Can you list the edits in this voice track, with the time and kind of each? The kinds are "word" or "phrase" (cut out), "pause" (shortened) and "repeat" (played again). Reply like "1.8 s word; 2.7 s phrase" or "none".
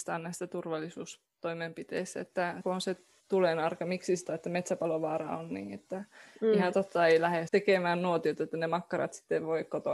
2.6 s word; 3.2 s word; 4.3 s word; 7.5 s word